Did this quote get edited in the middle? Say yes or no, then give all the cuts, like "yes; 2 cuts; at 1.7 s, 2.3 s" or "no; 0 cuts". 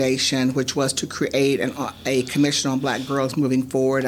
no; 0 cuts